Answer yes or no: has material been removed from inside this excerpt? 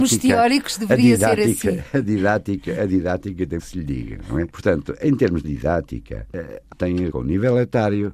yes